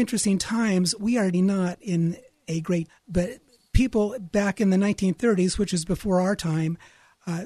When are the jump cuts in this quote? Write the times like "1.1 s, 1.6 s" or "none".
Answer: 1.3 s, 2.9 s

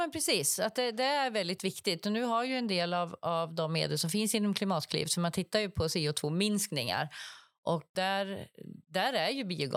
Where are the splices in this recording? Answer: none

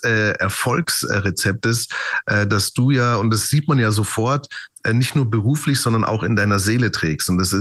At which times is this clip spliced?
none

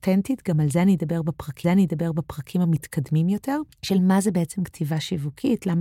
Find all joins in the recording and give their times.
1.6 s, 3.7 s

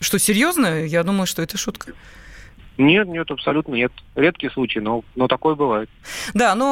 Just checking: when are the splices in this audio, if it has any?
none

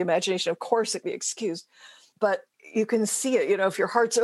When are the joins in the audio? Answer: 1.0 s

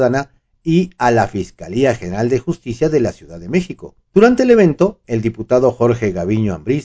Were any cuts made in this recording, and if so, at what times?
4.1 s

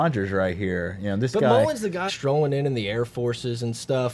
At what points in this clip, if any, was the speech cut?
2.1 s

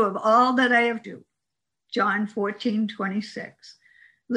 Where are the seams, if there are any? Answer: 1.0 s

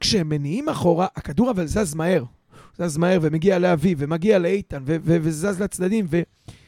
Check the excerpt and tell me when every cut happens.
none

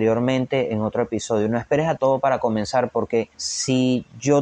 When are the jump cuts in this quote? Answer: 2.0 s, 3.3 s

